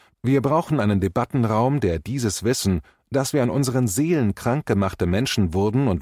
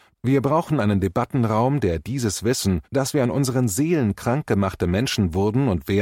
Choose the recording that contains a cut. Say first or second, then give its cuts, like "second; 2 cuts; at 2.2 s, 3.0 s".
second; 1 cut; at 2.8 s